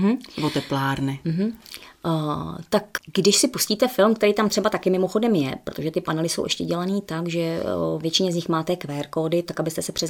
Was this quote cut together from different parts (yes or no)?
yes